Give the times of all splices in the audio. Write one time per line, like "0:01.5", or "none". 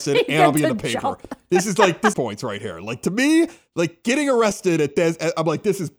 0:02.1